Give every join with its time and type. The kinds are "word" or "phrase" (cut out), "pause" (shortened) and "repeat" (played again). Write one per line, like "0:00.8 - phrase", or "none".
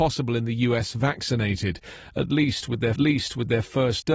0:03.0 - repeat